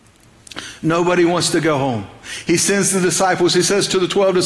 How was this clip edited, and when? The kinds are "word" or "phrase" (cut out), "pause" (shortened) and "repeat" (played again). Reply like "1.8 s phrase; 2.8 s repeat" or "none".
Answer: none